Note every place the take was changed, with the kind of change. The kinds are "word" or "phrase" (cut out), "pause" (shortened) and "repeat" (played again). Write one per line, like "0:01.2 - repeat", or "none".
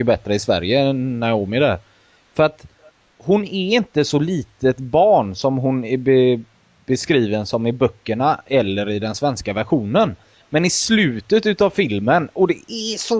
none